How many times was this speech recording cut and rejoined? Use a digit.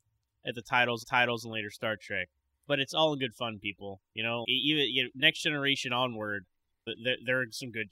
3